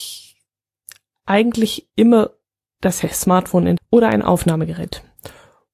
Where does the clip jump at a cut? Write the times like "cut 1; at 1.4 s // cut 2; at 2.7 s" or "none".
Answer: cut 1; at 3.8 s